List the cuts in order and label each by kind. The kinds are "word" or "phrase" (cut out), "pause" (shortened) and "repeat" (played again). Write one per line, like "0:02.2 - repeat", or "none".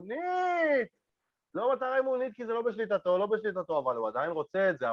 none